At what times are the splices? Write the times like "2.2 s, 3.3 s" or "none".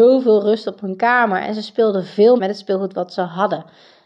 2.4 s